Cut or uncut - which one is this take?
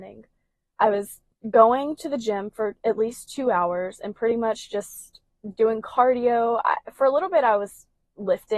cut